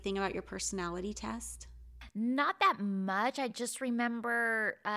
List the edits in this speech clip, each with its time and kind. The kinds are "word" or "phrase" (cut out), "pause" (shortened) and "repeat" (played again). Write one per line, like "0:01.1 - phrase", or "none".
none